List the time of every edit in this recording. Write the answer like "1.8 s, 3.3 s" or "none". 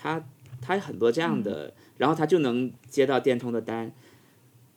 2.8 s